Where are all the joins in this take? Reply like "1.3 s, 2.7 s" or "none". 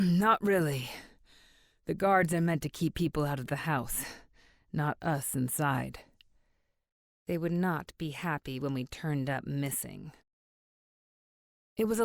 none